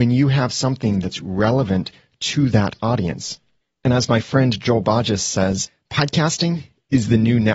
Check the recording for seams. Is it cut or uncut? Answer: uncut